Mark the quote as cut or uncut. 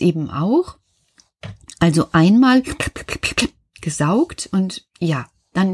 uncut